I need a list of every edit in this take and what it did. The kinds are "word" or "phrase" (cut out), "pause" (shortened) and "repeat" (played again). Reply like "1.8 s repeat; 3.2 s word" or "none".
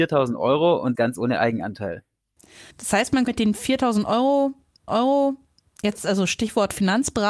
0.9 s word; 2.7 s pause; 3.3 s word; 4.9 s repeat